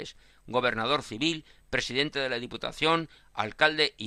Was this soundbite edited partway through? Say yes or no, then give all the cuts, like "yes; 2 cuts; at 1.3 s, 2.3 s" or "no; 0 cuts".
no; 0 cuts